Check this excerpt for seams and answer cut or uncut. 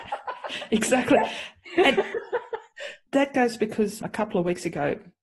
cut